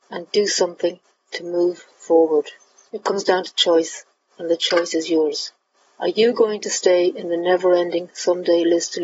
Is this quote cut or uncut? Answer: uncut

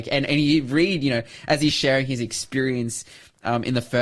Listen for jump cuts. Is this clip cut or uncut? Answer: uncut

